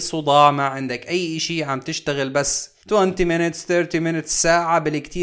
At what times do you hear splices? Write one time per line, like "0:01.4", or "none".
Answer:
0:02.8

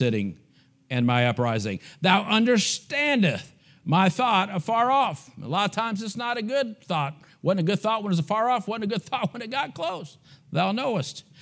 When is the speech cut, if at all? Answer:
none

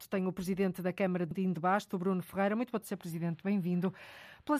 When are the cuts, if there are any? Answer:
0:01.3
0:02.8

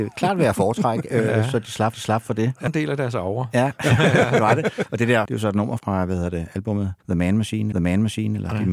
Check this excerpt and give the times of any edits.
0:01.9
0:02.7
0:05.3
0:05.8
0:07.0
0:07.7

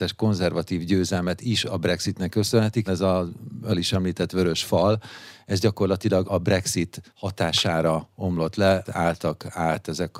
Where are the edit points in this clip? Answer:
0:02.9
0:03.7
0:06.2
0:07.1
0:08.8

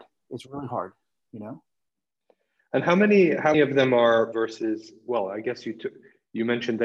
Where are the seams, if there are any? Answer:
0:03.5
0:04.3

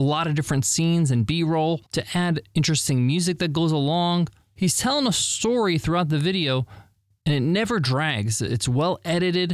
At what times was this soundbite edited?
0:01.9

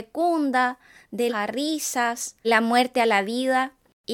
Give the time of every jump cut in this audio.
0:01.3
0:02.4

